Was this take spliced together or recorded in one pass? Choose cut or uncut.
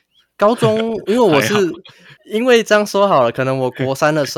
cut